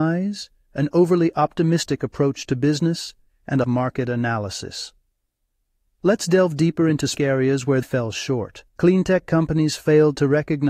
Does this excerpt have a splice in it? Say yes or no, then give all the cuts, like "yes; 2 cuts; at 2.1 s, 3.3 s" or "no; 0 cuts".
yes; 4 cuts; at 3.6 s, 7.2 s, 7.8 s, 8.7 s